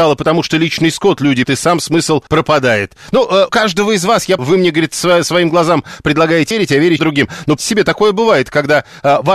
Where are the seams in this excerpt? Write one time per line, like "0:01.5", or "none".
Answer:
0:01.4
0:02.3
0:03.5
0:04.4
0:06.5
0:07.0
0:07.6